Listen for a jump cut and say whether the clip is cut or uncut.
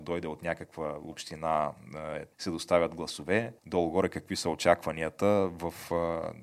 cut